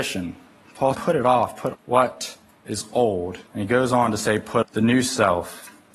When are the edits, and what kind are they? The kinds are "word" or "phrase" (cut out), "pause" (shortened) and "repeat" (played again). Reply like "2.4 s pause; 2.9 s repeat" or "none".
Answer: 0.9 s word; 1.7 s word; 3.5 s pause; 4.6 s word